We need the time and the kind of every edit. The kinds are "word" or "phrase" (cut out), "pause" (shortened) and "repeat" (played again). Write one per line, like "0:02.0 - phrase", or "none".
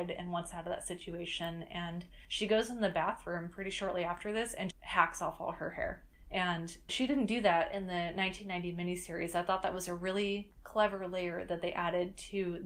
0:04.7 - word